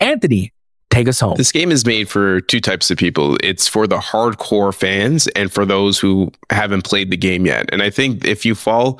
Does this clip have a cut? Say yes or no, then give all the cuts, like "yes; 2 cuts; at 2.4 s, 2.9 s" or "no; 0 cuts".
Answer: no; 0 cuts